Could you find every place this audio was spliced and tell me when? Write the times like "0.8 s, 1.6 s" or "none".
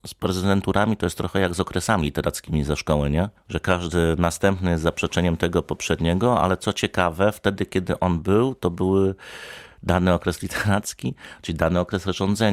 3.4 s